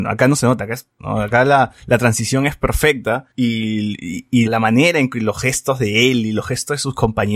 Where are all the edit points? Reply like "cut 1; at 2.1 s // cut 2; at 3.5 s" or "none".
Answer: cut 1; at 1.0 s // cut 2; at 1.8 s // cut 3; at 3.3 s // cut 4; at 4.5 s

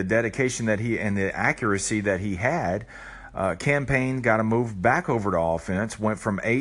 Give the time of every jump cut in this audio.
none

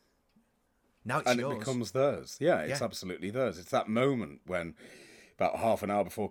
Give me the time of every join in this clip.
none

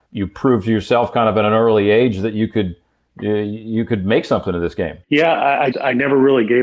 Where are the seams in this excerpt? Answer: cut 1; at 5.0 s // cut 2; at 5.7 s

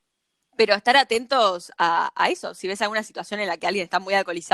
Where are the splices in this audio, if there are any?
none

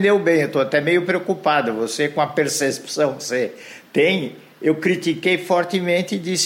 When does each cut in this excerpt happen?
none

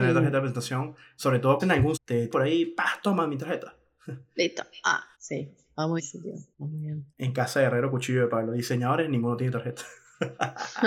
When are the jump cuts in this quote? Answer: cut 1; at 1.6 s // cut 2; at 1.9 s // cut 3; at 2.3 s // cut 4; at 5.1 s // cut 5; at 6.0 s // cut 6; at 6.5 s // cut 7; at 7.1 s

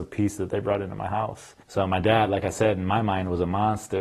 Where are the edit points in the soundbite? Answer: cut 1; at 1.6 s

